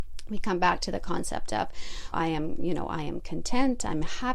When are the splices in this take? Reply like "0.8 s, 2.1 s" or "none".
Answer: 2.1 s